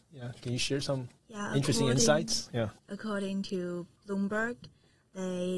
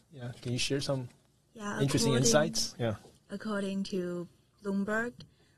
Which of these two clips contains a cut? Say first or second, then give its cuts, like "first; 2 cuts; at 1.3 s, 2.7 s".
first; 3 cuts; at 1.2 s, 2.8 s, 4.0 s